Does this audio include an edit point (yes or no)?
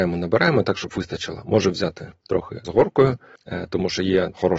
no